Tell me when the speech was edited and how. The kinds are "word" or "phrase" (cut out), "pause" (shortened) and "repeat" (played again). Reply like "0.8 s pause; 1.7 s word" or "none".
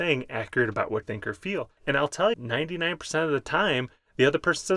1.0 s word; 1.8 s pause; 2.3 s word